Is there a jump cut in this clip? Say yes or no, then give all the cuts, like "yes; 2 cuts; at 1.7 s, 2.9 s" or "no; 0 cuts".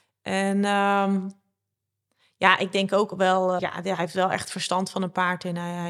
yes; 1 cut; at 3.6 s